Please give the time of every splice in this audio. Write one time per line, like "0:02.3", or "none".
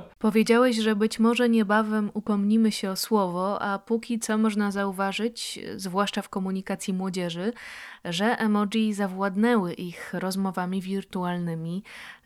none